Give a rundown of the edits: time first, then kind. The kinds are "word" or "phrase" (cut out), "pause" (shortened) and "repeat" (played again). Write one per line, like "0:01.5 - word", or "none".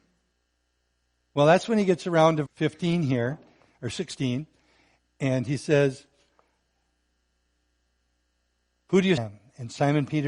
0:02.5 - word
0:09.2 - word